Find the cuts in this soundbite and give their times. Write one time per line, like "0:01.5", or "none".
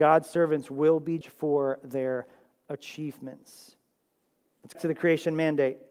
0:01.2
0:04.7

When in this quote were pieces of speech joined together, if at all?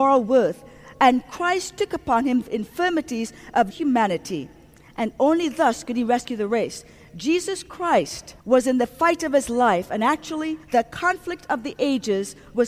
0:02.4
0:03.7
0:08.4
0:10.6

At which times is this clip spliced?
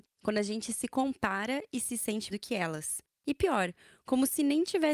0:02.3

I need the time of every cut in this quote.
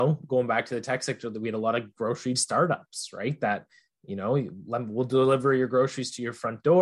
0:02.3

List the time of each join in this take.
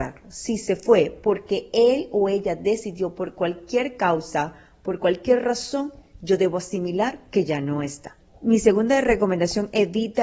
none

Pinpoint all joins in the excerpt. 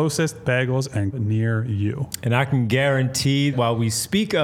0:01.1
0:03.5

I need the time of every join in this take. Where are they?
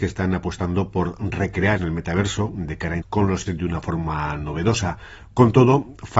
0:01.8
0:03.0
0:03.5

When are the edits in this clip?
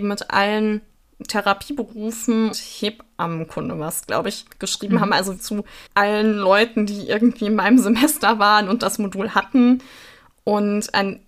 0:02.5
0:04.5
0:05.4
0:05.9

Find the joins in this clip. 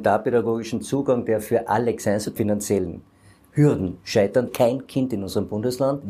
0:02.0
0:02.4
0:04.5

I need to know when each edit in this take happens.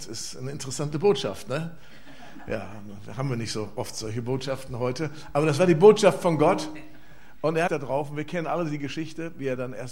0:07.7

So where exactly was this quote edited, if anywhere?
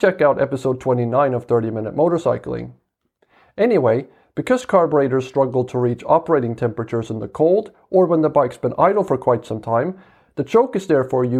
none

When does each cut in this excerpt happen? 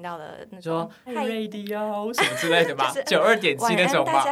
0:01.1

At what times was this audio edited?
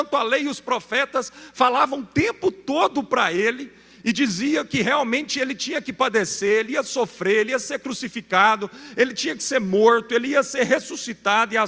none

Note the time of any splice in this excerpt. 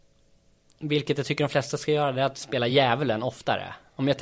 none

